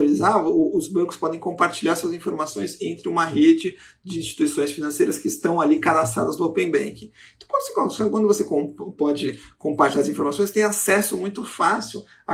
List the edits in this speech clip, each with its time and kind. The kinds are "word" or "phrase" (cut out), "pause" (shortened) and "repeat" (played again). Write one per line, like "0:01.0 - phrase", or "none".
none